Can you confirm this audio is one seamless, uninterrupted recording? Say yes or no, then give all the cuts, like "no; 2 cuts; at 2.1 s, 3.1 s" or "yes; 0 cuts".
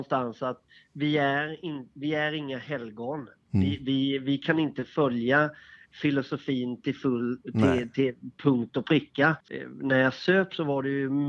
yes; 0 cuts